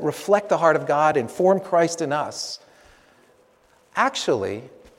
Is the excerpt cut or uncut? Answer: uncut